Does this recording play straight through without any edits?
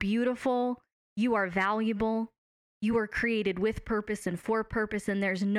yes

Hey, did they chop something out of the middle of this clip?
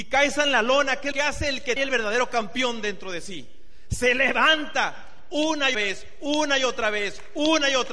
yes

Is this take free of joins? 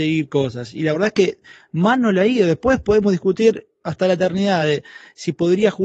yes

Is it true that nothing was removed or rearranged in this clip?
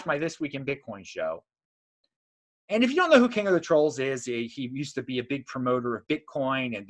yes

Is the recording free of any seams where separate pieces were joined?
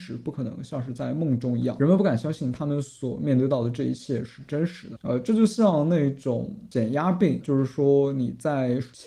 no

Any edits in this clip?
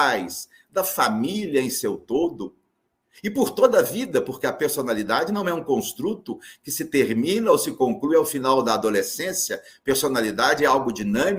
no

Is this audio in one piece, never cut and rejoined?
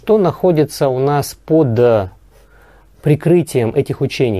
yes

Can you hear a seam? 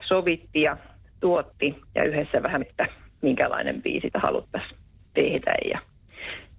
yes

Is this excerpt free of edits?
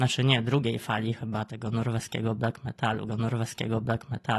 no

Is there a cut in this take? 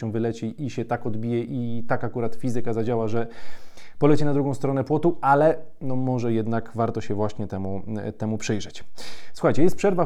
no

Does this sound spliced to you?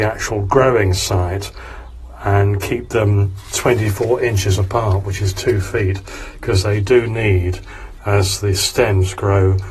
yes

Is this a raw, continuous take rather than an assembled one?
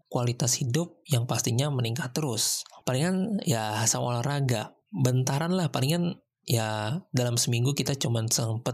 yes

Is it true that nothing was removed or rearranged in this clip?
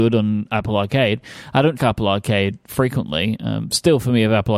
no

